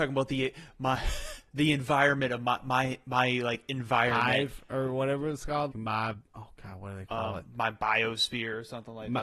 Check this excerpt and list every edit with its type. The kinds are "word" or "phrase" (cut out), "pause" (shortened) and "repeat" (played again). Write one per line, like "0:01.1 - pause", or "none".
0:01.5 - pause
0:05.7 - word